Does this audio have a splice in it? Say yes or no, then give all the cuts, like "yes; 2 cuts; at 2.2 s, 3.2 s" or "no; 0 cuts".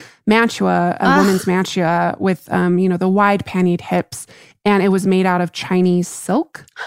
no; 0 cuts